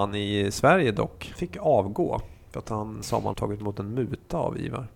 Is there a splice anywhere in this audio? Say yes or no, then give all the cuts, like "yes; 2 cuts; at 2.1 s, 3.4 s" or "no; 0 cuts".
yes; 3 cuts; at 1.4 s, 3.0 s, 3.3 s